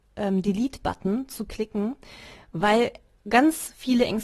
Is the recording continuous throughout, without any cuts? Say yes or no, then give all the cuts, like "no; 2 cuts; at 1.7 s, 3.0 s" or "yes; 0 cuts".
yes; 0 cuts